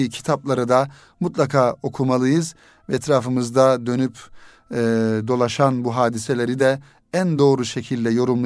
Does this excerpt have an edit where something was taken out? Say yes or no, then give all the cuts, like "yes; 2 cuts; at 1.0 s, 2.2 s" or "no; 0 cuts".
no; 0 cuts